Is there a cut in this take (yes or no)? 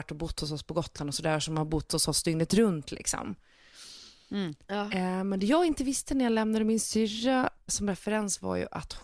yes